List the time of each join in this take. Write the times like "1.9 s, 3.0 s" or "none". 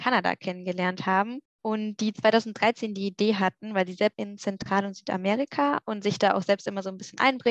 4.1 s